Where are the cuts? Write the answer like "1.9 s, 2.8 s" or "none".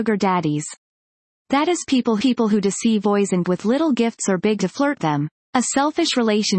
2.2 s, 3.0 s, 3.4 s, 4.6 s, 5.0 s, 5.4 s